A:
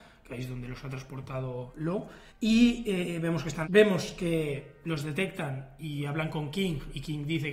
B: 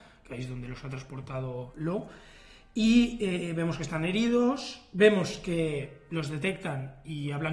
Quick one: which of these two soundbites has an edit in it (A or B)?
A